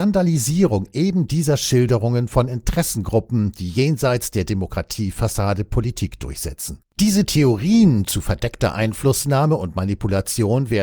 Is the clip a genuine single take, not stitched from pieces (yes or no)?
no